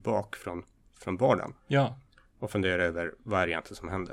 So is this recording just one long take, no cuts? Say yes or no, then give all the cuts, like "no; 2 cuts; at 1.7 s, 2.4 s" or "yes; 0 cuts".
yes; 0 cuts